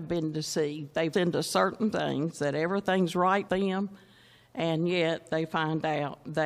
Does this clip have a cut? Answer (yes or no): yes